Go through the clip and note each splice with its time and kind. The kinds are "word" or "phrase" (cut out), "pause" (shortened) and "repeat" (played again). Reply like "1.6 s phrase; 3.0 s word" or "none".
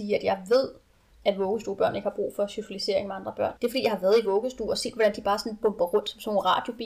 3.6 s pause